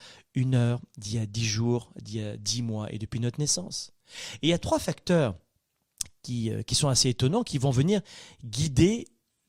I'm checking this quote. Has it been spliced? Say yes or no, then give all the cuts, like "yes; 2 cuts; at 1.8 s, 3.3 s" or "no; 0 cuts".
no; 0 cuts